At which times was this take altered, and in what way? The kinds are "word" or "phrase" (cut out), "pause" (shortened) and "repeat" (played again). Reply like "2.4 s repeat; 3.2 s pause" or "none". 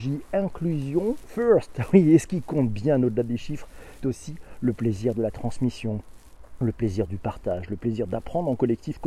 4.0 s word